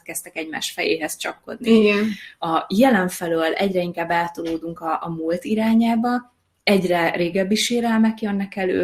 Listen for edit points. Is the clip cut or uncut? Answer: uncut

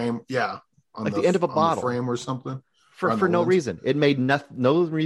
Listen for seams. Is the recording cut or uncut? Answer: uncut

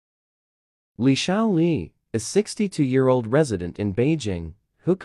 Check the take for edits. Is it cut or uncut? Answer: uncut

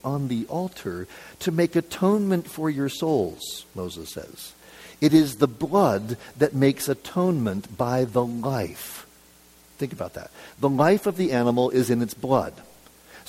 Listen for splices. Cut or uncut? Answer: uncut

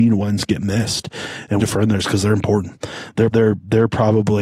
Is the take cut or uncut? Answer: cut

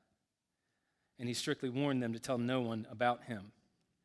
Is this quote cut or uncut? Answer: uncut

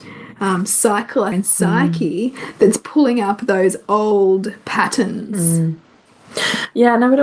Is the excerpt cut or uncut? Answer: cut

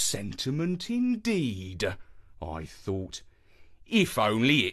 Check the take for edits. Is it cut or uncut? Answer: uncut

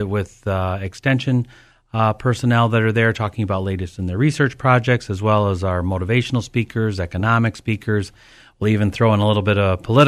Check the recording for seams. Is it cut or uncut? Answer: uncut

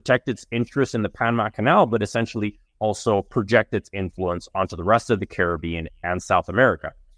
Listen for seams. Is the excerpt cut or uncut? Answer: uncut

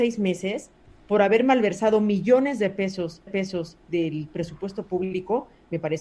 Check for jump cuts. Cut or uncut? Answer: cut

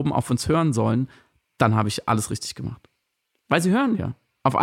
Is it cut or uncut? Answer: uncut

